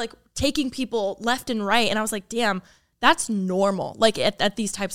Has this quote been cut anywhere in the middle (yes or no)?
no